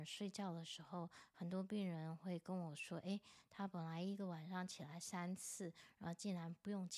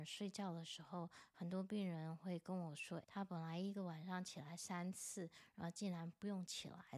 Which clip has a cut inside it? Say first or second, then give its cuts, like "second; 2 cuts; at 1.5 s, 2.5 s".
second; 1 cut; at 3.0 s